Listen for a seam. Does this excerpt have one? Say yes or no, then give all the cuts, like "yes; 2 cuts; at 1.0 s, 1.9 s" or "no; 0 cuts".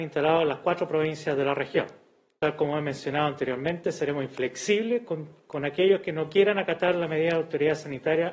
no; 0 cuts